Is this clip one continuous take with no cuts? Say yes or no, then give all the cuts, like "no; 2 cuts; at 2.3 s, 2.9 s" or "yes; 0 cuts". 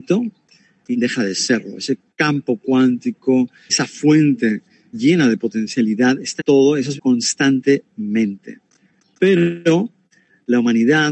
no; 5 cuts; at 0.9 s, 3.7 s, 4.9 s, 6.4 s, 7.0 s